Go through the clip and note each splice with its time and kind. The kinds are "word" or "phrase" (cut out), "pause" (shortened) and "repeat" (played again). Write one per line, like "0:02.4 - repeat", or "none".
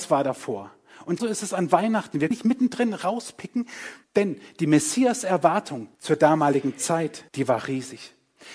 0:01.2 - word
0:02.3 - word
0:04.0 - pause
0:05.9 - pause
0:07.3 - pause